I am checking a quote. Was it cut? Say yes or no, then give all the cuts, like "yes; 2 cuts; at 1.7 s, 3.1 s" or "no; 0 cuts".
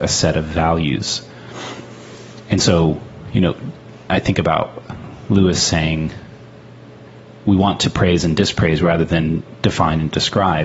no; 0 cuts